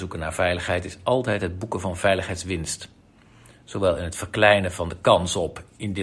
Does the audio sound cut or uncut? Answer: uncut